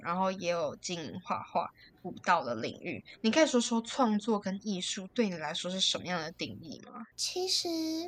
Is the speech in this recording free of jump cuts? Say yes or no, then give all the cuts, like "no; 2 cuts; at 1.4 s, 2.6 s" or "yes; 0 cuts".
yes; 0 cuts